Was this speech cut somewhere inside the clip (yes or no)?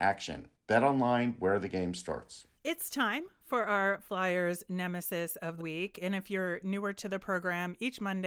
yes